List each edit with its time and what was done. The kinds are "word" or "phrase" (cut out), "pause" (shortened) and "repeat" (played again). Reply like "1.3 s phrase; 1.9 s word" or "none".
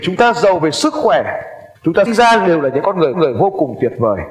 1.8 s pause; 2.1 s word; 3.1 s repeat